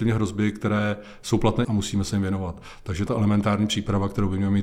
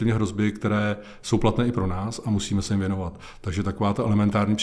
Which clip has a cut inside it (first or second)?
first